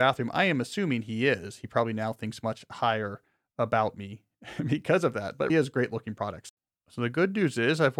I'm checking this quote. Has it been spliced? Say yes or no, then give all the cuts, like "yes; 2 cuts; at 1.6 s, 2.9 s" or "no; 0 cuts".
yes; 1 cut; at 5.5 s